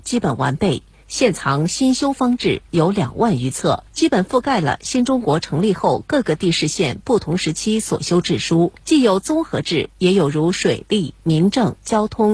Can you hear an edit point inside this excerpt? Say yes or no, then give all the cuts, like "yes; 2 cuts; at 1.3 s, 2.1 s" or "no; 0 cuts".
yes; 2 cuts; at 3.9 s, 8.8 s